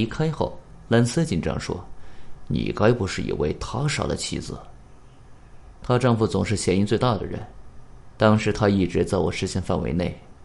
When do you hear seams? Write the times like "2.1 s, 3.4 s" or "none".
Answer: 8.1 s

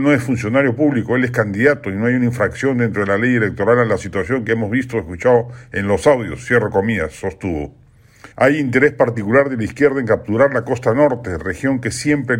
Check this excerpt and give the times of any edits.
8.3 s

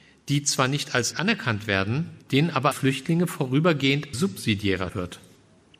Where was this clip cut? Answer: 1.1 s, 2.2 s, 2.7 s, 4.1 s, 4.9 s

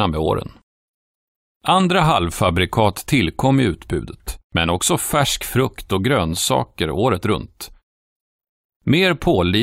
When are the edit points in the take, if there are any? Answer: none

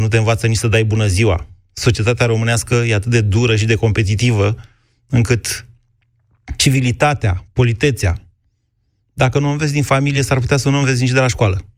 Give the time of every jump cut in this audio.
none

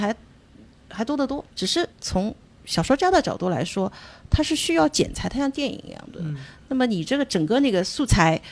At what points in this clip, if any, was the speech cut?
1.5 s, 1.9 s

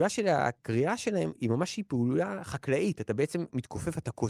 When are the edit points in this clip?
none

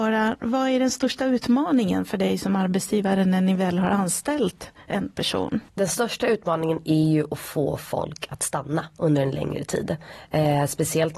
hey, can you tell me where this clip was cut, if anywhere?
5.7 s

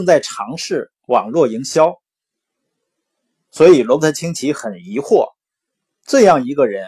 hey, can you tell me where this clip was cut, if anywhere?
none

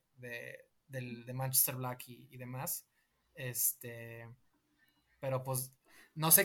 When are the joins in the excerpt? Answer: none

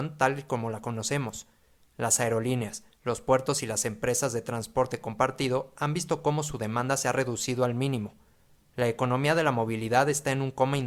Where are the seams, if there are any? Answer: none

